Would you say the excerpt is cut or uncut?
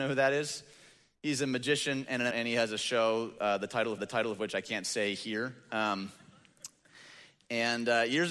cut